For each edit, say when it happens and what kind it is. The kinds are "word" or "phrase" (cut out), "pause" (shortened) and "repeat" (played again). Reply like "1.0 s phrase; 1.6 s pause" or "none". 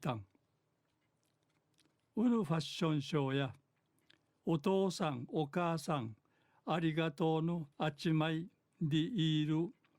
7.7 s pause